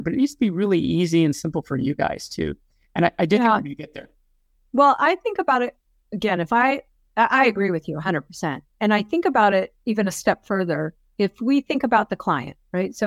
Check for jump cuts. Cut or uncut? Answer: uncut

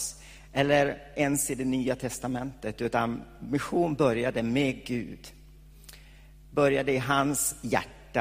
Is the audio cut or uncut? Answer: uncut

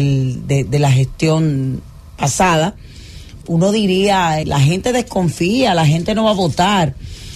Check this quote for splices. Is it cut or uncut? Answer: cut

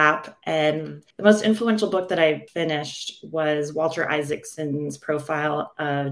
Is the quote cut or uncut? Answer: cut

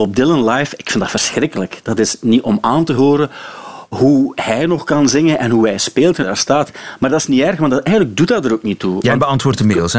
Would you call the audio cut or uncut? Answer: cut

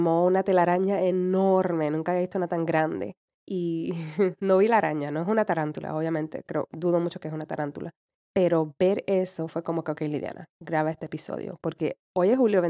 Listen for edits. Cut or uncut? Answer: uncut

